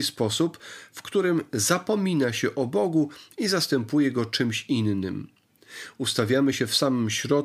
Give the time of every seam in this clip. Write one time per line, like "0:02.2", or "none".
none